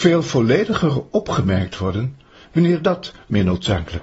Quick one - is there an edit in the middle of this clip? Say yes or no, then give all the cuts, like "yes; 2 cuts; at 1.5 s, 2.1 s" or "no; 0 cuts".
no; 0 cuts